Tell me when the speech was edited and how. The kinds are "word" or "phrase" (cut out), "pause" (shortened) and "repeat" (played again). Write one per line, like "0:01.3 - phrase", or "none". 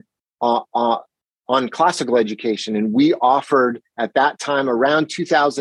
none